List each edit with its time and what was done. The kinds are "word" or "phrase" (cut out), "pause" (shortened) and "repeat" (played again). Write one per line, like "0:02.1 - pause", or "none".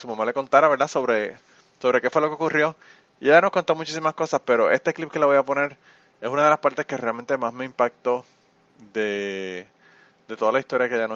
none